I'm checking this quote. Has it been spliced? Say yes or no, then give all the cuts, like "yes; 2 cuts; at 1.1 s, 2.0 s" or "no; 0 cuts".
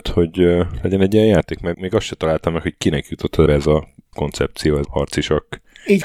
yes; 4 cuts; at 1.7 s, 3.5 s, 4.1 s, 4.8 s